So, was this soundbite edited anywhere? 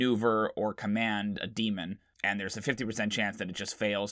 no; 0 cuts

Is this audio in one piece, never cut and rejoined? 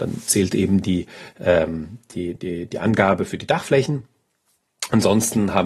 yes; 0 cuts

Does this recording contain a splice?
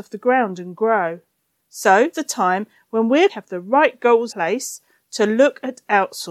yes; 3 cuts; at 2.1 s, 3.3 s, 4.3 s

